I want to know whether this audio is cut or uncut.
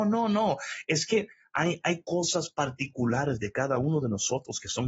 uncut